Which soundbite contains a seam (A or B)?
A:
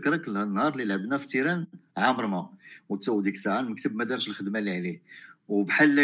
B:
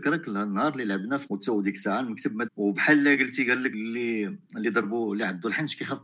B